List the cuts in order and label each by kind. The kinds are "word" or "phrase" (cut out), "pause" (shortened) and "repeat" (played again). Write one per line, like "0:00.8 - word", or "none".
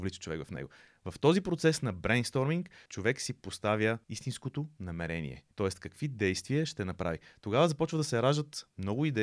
0:02.9 - pause
0:04.0 - pause
0:05.5 - pause